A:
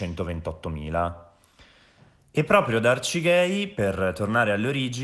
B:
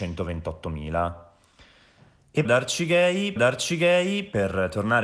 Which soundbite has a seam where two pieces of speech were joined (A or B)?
B